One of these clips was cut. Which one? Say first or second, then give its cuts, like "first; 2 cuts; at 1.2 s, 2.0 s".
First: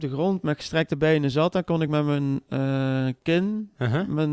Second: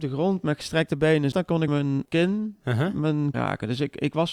second; 4 cuts; at 1.3 s, 1.7 s, 2.1 s, 3.3 s